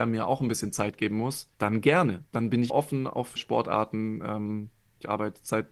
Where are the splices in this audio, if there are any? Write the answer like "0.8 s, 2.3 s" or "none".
1.5 s, 2.3 s, 2.7 s, 3.4 s